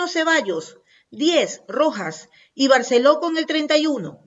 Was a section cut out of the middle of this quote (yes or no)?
no